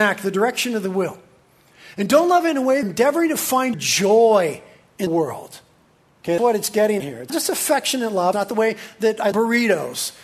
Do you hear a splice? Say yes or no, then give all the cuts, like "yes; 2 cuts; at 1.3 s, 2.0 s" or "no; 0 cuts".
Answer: yes; 8 cuts; at 2.8 s, 3.7 s, 5.1 s, 6.4 s, 7.0 s, 7.3 s, 8.3 s, 9.3 s